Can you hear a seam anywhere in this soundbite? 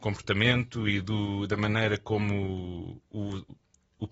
no; 0 cuts

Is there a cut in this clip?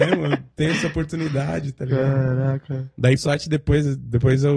yes; 1 cut; at 3.2 s

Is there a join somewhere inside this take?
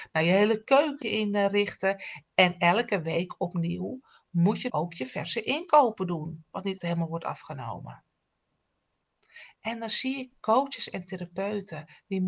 yes; 3 cuts; at 1.0 s, 4.7 s, 6.8 s

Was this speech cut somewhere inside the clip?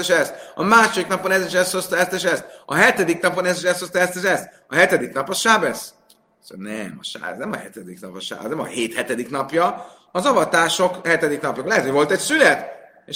no; 0 cuts

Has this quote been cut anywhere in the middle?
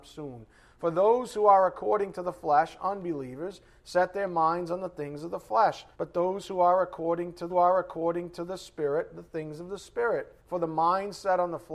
yes; 3 cuts; at 5.9 s, 7.5 s, 10.4 s

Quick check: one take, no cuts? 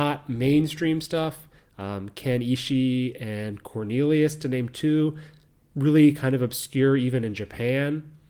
yes; 0 cuts

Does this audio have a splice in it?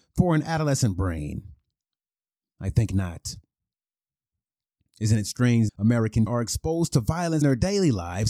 yes; 3 cuts; at 5.7 s, 6.3 s, 7.4 s

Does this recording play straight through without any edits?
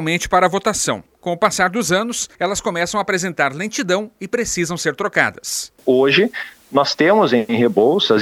no; 1 cut; at 2.3 s

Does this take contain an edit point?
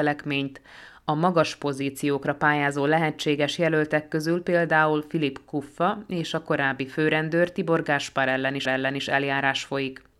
yes; 1 cut; at 8.6 s

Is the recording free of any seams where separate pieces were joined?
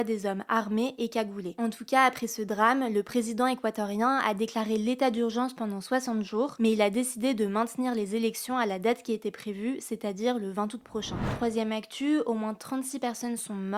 yes; 0 cuts

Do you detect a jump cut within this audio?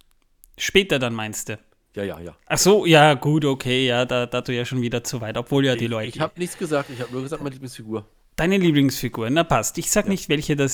yes; 1 cut; at 4.4 s

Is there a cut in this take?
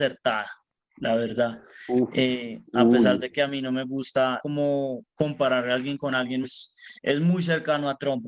yes; 4 cuts; at 4.4 s, 5.1 s, 6.4 s, 7.0 s

